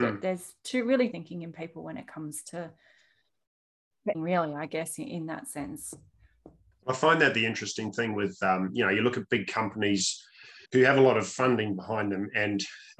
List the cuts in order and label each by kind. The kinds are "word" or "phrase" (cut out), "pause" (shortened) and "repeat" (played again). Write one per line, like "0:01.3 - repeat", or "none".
0:01.1 - phrase
0:04.1 - word
0:06.7 - pause
0:10.7 - pause